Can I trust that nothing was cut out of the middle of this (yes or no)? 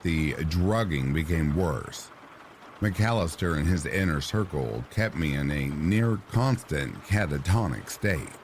yes